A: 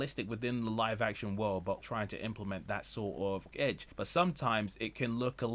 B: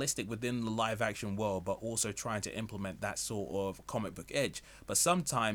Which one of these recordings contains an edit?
A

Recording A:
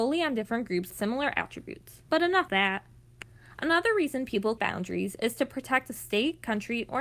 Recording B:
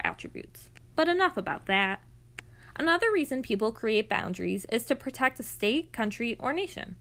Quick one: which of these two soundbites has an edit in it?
A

